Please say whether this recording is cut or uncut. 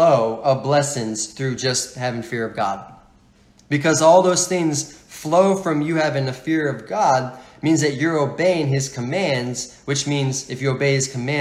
uncut